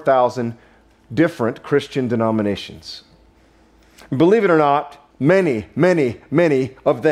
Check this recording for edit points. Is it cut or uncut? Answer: cut